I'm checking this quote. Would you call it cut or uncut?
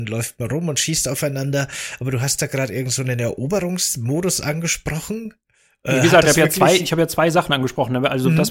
uncut